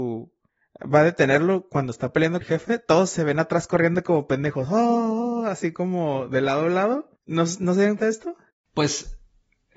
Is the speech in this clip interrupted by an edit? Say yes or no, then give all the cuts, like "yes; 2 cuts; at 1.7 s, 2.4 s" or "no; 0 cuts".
yes; 4 cuts; at 2.4 s, 7.2 s, 8.0 s, 8.5 s